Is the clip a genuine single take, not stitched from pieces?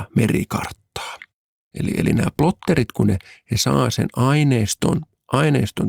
yes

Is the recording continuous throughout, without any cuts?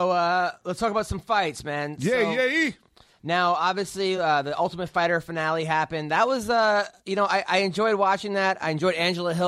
yes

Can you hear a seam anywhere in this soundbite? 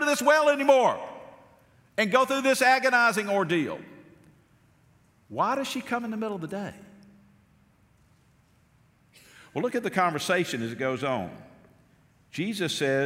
no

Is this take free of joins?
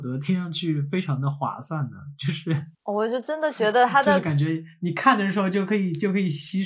no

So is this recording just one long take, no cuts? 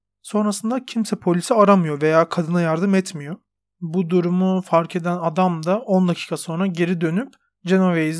yes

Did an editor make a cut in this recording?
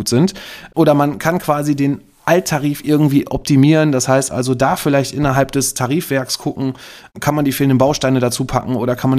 no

